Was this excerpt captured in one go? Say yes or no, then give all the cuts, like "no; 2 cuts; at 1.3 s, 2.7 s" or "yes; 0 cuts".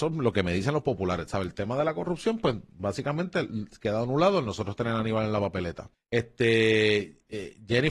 no; 1 cut; at 5.9 s